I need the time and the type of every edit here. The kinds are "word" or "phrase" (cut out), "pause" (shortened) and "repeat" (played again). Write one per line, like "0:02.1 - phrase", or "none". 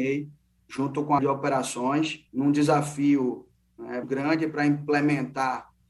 0:01.2 - word
0:02.3 - pause
0:04.0 - word

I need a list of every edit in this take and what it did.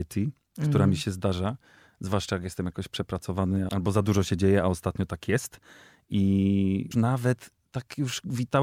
0:03.7 - word
0:06.9 - word

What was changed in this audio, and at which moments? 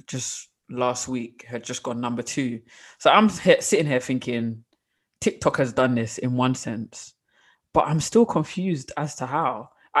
none

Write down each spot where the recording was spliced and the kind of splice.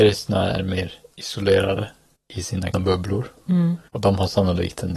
0:02.1 - pause
0:02.7 - word
0:03.9 - pause

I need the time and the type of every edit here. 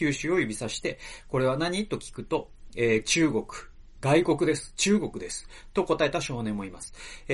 none

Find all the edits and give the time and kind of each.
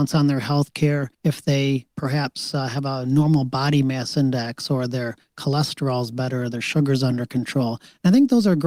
none

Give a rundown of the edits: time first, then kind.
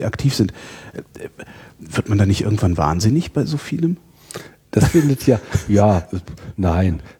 none

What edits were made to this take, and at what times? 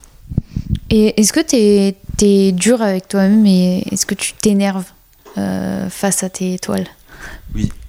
none

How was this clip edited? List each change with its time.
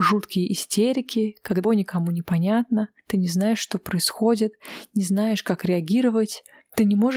0:01.6 - word

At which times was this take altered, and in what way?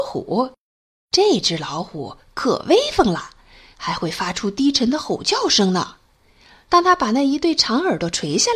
none

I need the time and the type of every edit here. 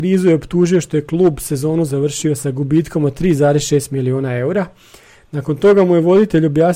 none

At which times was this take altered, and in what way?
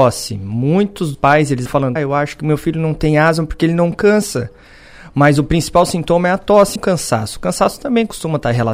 0:01.1 - word
0:01.7 - word
0:02.0 - word
0:06.8 - word

